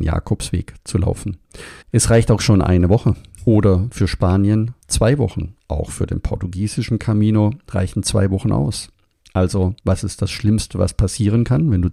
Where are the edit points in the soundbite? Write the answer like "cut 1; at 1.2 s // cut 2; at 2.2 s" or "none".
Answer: cut 1; at 1.8 s // cut 2; at 4.8 s // cut 3; at 9.8 s